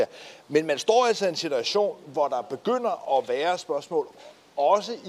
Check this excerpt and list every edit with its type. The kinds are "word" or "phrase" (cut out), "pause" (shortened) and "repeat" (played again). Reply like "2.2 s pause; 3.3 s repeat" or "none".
none